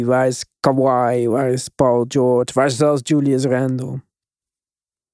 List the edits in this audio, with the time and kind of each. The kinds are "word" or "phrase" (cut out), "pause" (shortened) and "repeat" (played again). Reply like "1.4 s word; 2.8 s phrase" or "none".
none